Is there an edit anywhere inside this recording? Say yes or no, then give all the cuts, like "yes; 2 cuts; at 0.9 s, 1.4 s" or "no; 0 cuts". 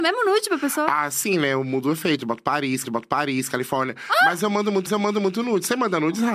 yes; 2 cuts; at 2.8 s, 4.9 s